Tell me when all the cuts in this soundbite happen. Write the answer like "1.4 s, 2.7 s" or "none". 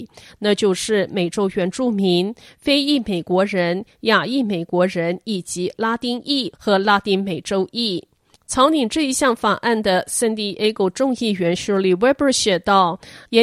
none